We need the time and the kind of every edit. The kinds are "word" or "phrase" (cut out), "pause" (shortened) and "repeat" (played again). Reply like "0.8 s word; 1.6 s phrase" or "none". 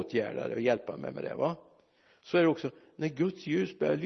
none